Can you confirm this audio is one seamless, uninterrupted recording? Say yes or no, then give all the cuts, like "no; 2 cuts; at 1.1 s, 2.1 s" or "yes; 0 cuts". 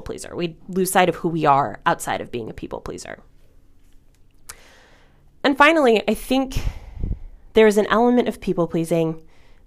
yes; 0 cuts